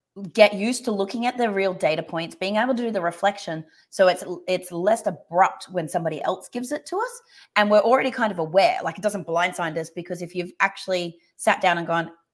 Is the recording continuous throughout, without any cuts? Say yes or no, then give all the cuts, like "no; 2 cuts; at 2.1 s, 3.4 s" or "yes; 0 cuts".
yes; 0 cuts